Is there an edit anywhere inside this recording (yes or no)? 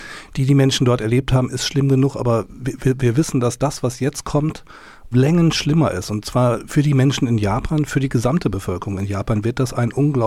yes